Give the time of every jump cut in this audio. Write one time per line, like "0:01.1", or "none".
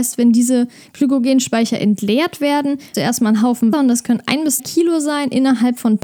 0:02.9
0:03.7
0:04.6